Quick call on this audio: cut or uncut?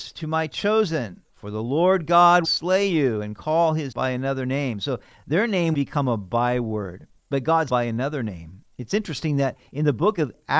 cut